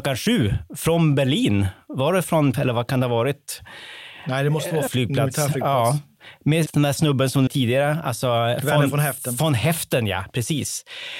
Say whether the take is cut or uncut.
cut